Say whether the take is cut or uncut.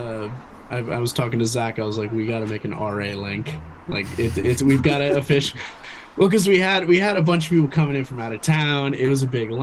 uncut